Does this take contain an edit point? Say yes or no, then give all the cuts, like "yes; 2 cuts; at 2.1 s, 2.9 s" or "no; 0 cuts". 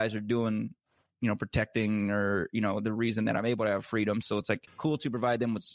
no; 0 cuts